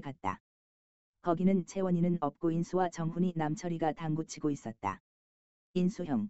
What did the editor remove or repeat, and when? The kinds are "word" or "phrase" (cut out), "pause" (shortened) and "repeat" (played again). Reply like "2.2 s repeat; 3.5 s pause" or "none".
none